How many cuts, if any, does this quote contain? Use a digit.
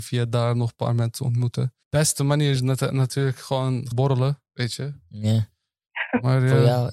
3